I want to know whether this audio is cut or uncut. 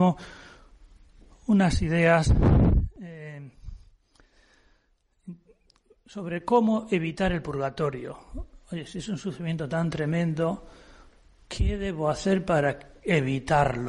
uncut